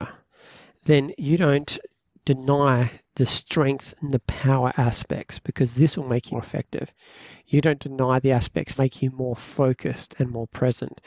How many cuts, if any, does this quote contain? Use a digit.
2